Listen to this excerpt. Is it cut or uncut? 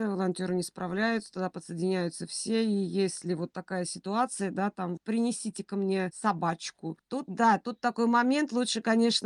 cut